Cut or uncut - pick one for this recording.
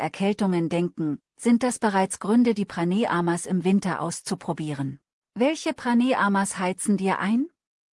cut